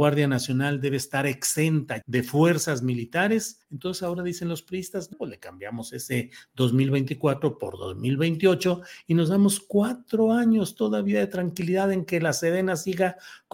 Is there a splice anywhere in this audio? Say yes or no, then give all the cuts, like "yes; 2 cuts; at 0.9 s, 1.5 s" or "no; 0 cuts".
yes; 3 cuts; at 2.0 s, 3.6 s, 5.1 s